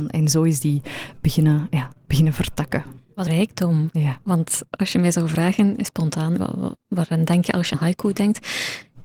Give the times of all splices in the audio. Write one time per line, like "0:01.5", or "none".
0:03.3
0:06.4
0:07.7